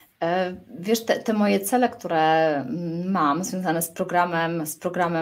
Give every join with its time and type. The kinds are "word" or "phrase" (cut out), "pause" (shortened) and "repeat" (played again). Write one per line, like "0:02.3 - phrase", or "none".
none